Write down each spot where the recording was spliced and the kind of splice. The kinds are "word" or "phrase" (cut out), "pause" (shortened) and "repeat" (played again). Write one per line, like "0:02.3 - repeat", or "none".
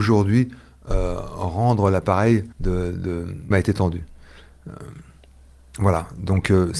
0:02.5 - pause
0:03.5 - phrase